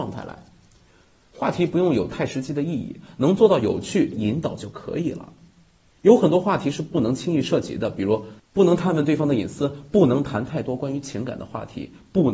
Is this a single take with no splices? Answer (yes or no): no